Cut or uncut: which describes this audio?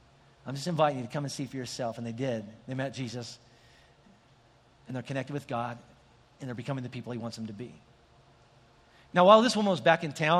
uncut